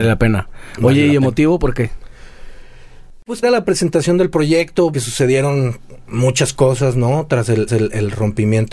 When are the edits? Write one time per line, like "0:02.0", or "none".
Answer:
0:03.4
0:04.9
0:07.7